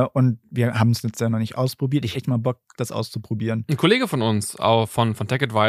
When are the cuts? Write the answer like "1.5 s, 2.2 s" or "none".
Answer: 2.1 s